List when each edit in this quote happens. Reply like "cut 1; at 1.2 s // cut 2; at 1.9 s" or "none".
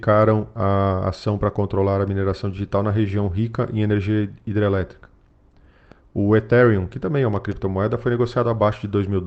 none